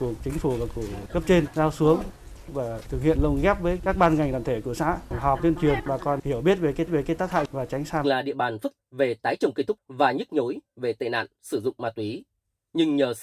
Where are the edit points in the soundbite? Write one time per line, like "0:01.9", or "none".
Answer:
0:06.9
0:08.0
0:08.8
0:09.8